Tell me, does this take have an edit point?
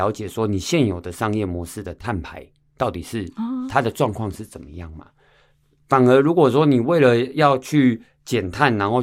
no; 0 cuts

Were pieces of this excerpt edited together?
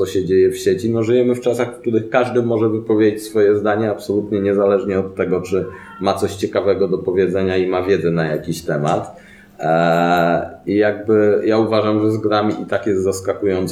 no; 0 cuts

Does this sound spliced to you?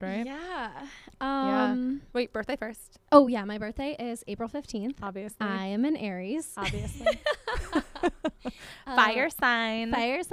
no; 0 cuts

